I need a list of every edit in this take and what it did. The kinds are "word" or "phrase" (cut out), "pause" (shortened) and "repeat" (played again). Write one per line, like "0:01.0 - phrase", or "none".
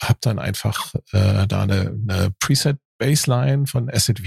none